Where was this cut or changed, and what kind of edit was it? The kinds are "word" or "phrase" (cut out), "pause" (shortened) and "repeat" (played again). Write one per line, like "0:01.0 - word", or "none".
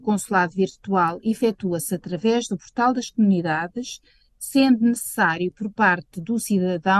none